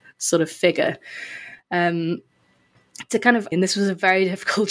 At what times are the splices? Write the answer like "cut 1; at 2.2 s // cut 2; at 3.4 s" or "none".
cut 1; at 3.5 s